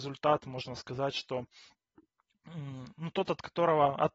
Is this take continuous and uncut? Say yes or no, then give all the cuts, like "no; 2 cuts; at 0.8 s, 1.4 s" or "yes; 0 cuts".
yes; 0 cuts